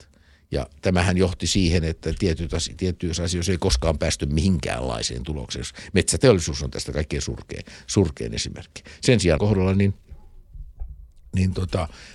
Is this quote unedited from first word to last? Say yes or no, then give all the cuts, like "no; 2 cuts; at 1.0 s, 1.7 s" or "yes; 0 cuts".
no; 1 cut; at 9.4 s